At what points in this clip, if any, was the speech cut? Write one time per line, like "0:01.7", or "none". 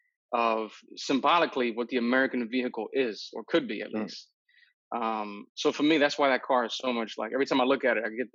none